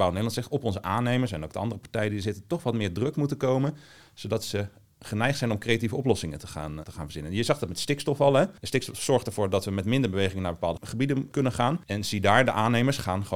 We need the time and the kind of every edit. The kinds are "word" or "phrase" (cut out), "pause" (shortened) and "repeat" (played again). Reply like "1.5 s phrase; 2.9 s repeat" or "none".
6.8 s word